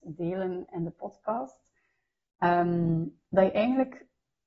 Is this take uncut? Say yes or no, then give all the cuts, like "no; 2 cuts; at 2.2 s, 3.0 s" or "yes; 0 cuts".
yes; 0 cuts